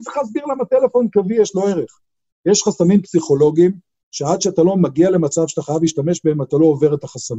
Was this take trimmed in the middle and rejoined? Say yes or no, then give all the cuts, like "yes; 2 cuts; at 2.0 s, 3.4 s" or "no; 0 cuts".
no; 0 cuts